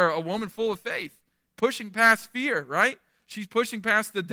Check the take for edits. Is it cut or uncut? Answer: uncut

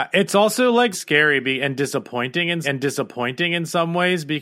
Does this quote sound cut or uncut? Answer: cut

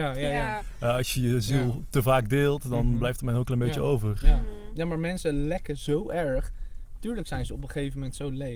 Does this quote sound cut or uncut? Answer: uncut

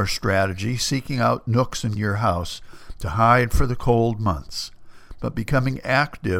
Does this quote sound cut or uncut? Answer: cut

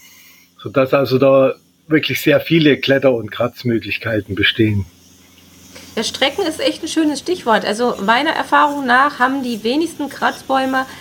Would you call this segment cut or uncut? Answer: uncut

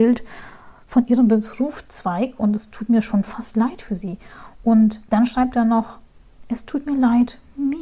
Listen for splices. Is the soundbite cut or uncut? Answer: cut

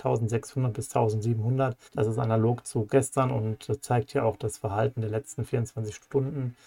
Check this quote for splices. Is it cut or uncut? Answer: cut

